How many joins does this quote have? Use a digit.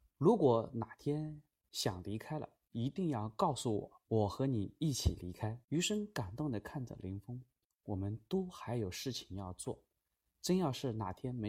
3